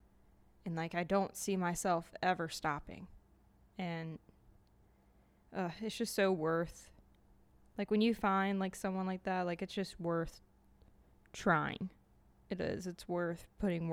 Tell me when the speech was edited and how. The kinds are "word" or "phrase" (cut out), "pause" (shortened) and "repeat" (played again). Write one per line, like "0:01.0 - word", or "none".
none